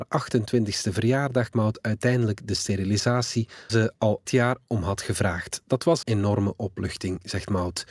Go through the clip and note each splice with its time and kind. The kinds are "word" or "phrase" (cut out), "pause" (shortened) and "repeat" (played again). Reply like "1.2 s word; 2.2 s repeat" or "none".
1.5 s word; 3.7 s word; 4.3 s word; 6.0 s word